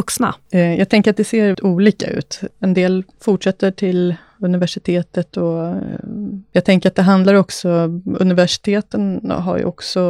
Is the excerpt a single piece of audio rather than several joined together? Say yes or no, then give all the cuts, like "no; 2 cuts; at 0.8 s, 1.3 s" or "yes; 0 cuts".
no; 2 cuts; at 1.5 s, 3.1 s